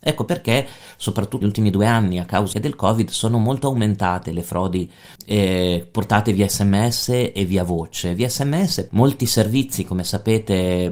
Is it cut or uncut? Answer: cut